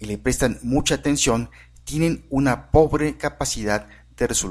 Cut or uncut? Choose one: uncut